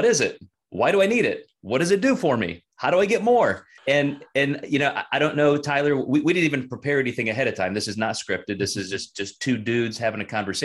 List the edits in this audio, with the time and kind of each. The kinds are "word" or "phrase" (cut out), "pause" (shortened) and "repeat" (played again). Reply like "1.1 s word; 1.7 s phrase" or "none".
3.8 s pause